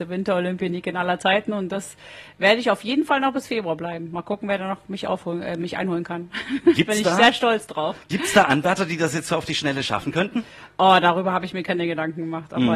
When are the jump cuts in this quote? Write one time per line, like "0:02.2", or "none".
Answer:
none